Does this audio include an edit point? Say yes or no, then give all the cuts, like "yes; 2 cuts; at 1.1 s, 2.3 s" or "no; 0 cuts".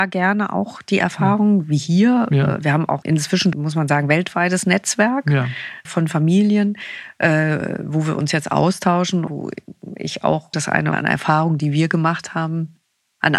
yes; 6 cuts; at 3.0 s, 3.5 s, 5.9 s, 9.3 s, 10.5 s, 10.9 s